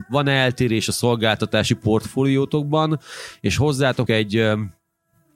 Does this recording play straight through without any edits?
no; 1 cut; at 4.1 s

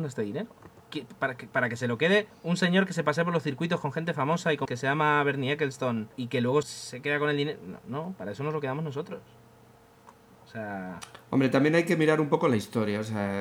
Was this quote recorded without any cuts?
no; 4 cuts; at 2.3 s, 4.7 s, 6.1 s, 6.6 s

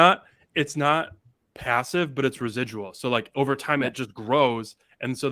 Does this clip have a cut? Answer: no; 0 cuts

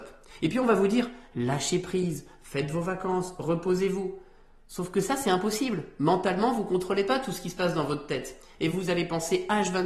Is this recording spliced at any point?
no; 0 cuts

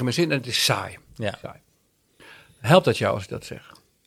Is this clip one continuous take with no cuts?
yes; 0 cuts

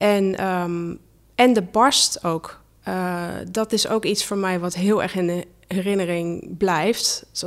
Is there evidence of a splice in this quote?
no; 0 cuts

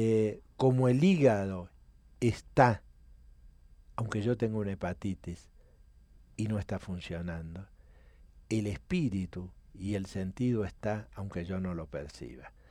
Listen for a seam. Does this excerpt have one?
no; 0 cuts

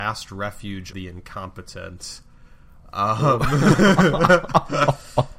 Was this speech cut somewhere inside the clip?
yes; 1 cut; at 0.9 s

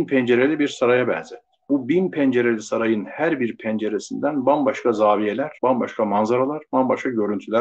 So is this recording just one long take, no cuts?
no; 2 cuts; at 1.6 s, 5.6 s

